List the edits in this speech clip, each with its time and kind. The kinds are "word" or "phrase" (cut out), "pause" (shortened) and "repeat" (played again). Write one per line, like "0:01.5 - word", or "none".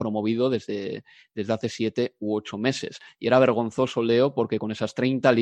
none